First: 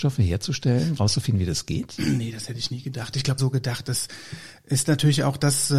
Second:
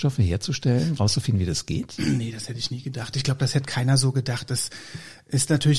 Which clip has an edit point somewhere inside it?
first; 1 cut; at 3.4 s

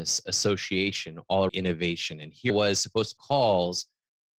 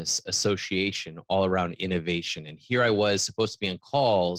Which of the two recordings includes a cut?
first; 3 cuts; at 1.5 s, 2.5 s, 3.2 s

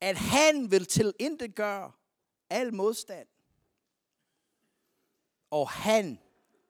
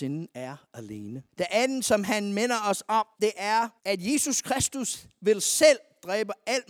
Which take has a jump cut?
second; 3 cuts; at 1.3 s, 3.1 s, 3.8 s

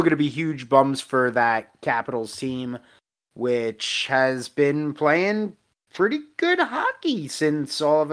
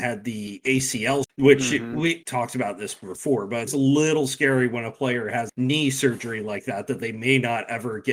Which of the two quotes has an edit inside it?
second; 4 cuts; at 1.2 s, 2.2 s, 3.7 s, 5.5 s

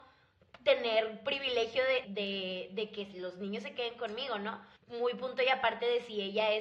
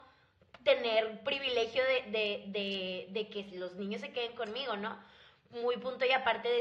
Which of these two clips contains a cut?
first; 2 cuts; at 2.0 s, 4.8 s

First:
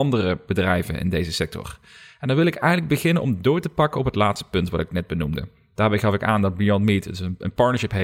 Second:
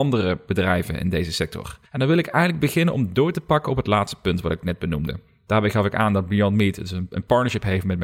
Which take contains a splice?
second; 1 cut; at 1.9 s

